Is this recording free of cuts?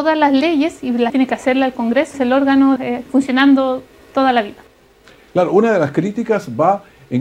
no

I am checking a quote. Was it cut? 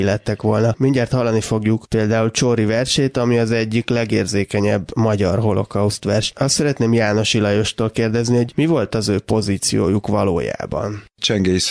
no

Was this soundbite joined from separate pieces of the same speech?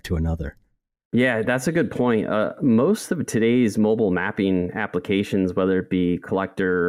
no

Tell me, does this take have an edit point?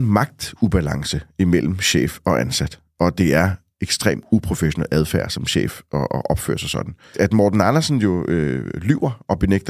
no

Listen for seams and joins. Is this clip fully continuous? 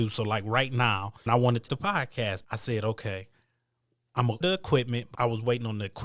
no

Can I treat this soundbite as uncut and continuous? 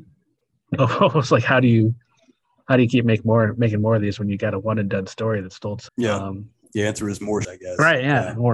no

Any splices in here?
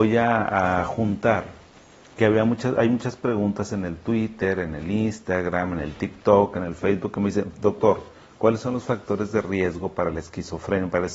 no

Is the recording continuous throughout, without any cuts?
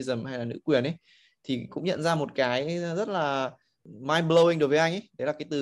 yes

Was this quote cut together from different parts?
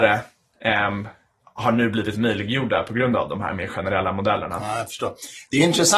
no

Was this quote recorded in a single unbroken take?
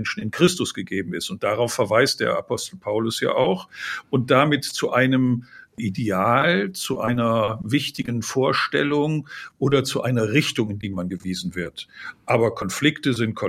yes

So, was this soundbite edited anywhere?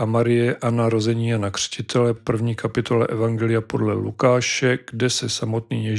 yes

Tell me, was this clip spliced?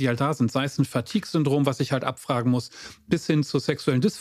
no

